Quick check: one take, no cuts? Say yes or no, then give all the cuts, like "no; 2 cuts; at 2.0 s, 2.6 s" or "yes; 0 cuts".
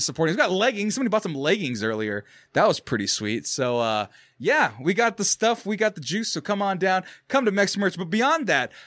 yes; 0 cuts